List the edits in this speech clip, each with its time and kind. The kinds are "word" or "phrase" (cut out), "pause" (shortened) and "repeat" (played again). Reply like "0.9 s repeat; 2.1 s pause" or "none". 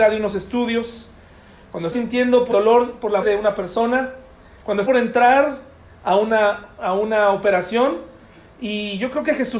1.9 s word; 2.5 s word; 3.2 s word; 4.9 s word